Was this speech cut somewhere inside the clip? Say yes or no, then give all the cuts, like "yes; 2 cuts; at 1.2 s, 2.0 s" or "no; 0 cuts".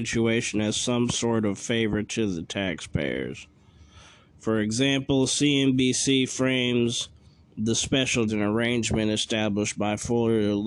yes; 1 cut; at 8.3 s